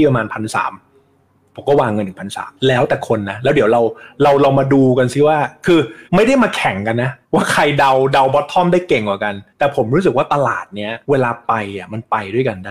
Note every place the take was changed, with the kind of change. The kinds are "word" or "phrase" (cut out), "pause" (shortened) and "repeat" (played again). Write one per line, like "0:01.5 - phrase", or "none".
0:02.6 - pause
0:06.1 - pause
0:07.2 - pause
0:09.5 - pause
0:11.0 - pause